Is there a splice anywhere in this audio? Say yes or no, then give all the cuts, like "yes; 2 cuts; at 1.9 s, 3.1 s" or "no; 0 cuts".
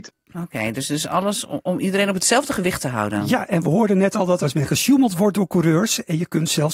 yes; 1 cut; at 4.4 s